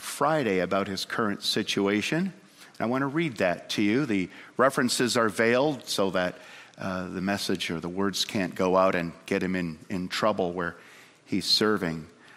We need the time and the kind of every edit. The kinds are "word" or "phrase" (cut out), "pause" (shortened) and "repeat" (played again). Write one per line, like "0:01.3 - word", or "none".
none